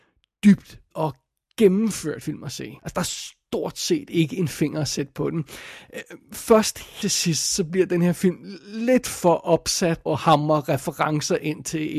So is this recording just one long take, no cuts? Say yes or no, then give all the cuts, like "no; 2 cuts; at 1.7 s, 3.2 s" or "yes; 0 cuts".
no; 5 cuts; at 0.9 s, 2.2 s, 2.8 s, 7.0 s, 10.1 s